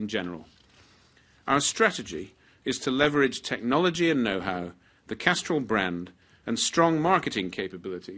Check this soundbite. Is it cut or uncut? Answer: uncut